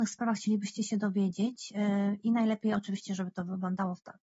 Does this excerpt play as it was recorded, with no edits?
yes; 0 cuts

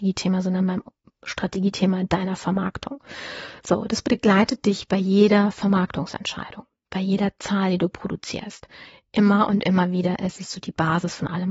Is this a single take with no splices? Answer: yes; 0 cuts

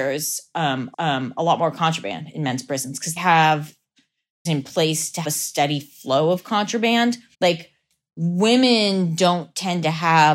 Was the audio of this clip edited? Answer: yes; 5 cuts; at 0.9 s, 3.2 s, 4.5 s, 5.2 s, 7.3 s

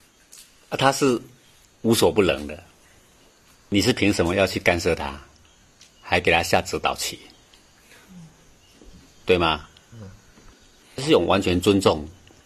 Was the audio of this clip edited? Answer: no; 0 cuts

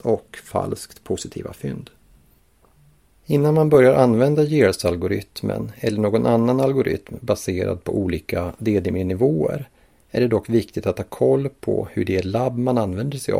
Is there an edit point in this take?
no; 0 cuts

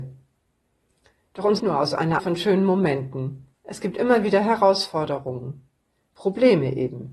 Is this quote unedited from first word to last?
no; 3 cuts; at 1.6 s, 2.2 s, 3.5 s

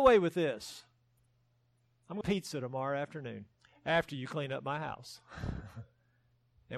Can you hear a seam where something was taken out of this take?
yes; 2 cuts; at 2.2 s, 3.5 s

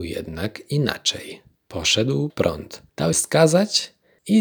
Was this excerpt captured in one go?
no; 2 cuts; at 2.3 s, 3.1 s

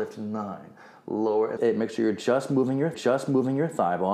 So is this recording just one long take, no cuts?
no; 2 cuts; at 1.6 s, 2.9 s

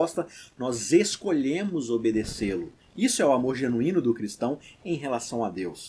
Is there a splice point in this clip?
no; 0 cuts

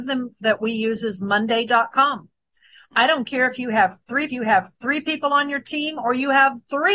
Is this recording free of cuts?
no; 1 cut; at 4.3 s

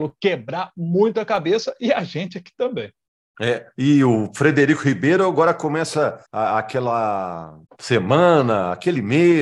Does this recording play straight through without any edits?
no; 2 cuts; at 6.3 s, 7.7 s

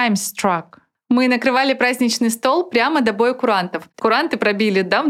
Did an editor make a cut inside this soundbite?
yes; 1 cut; at 4.0 s

